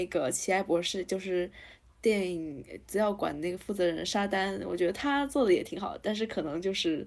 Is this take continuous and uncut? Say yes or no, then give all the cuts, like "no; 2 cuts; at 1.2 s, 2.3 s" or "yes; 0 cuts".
yes; 0 cuts